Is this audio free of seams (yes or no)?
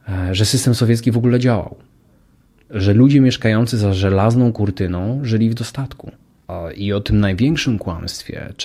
yes